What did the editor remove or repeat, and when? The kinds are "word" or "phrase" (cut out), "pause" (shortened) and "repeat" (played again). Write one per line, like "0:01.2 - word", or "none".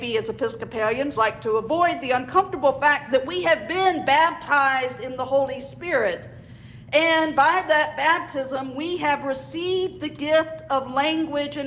none

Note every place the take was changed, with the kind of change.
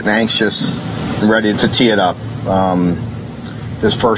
0:01.2 - word
0:01.5 - word

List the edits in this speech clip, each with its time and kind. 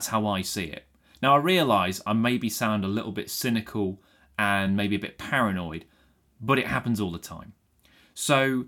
none

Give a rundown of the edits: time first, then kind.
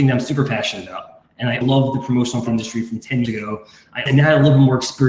0:01.6 - word
0:02.5 - word
0:03.2 - word
0:04.1 - word

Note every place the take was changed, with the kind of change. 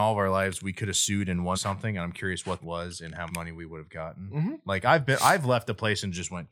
0:01.5 - word
0:02.6 - phrase
0:03.3 - word

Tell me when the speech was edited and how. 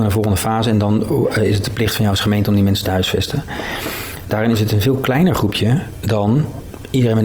none

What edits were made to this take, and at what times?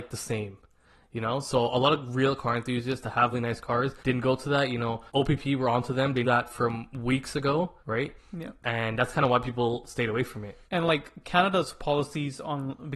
0:03.3 - word
0:04.0 - pause
0:06.2 - word
0:07.8 - pause
0:10.7 - pause

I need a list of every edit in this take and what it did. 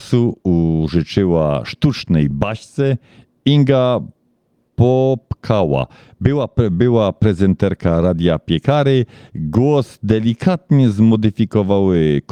none

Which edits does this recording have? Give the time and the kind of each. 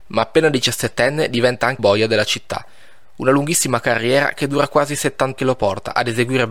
0:01.8 - word
0:05.4 - phrase

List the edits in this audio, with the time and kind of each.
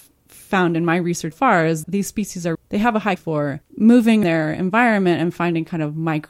0:01.3 - word
0:01.8 - word
0:02.5 - word
0:03.2 - word
0:04.2 - word

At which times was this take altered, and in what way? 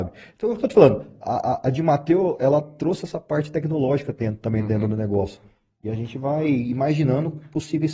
none

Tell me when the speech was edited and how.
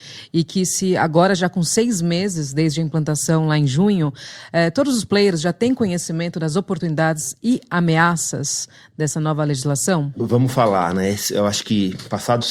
none

